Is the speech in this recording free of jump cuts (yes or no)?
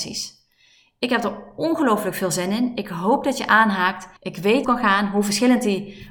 no